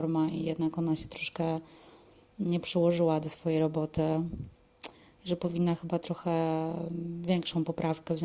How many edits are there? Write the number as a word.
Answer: zero